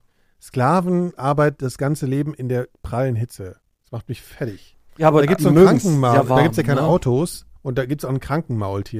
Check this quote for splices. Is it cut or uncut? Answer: cut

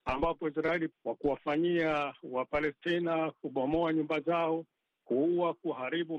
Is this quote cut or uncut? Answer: uncut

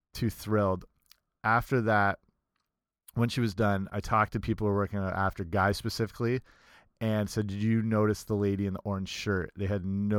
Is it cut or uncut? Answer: uncut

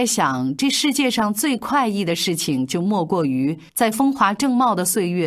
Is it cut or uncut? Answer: cut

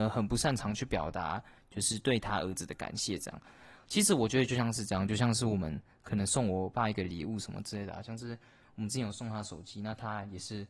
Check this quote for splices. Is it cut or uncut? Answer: uncut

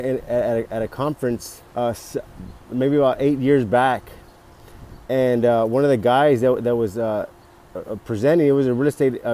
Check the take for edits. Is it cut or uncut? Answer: cut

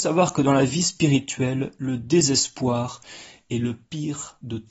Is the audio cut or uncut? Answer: uncut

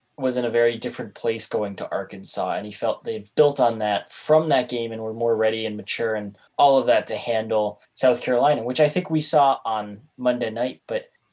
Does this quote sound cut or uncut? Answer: cut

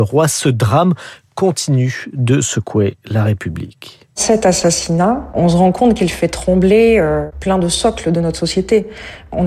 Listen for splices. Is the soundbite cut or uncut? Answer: uncut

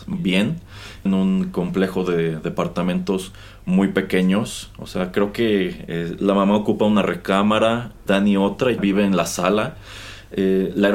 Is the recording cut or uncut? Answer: cut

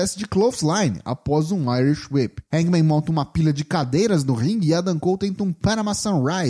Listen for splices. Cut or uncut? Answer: uncut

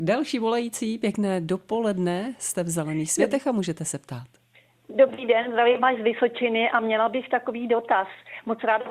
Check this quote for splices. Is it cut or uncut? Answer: uncut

